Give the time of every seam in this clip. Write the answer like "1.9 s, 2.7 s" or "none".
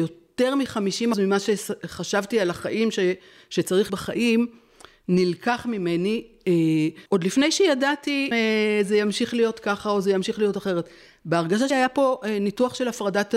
1.1 s, 3.9 s, 7.1 s, 8.3 s, 11.7 s